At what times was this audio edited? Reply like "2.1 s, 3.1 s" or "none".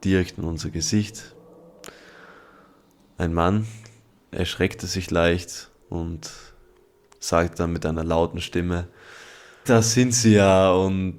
5.8 s, 9.7 s